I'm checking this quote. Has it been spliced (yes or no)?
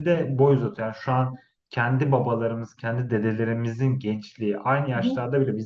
no